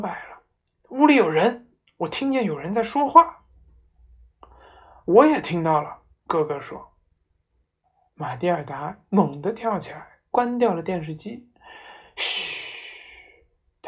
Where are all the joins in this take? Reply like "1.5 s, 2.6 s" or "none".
7.8 s